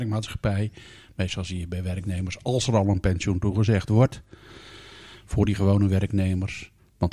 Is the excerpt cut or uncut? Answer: uncut